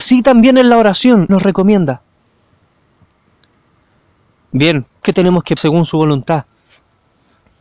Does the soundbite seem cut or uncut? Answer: cut